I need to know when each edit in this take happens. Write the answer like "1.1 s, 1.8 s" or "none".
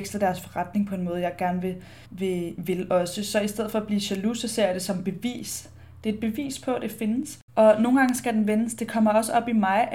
2.1 s, 7.5 s